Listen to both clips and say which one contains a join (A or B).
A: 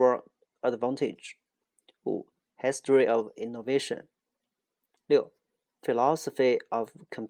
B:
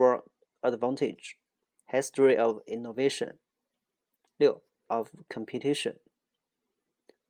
B